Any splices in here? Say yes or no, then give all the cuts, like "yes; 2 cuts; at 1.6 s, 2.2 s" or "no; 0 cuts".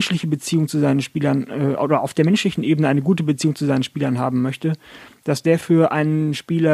no; 0 cuts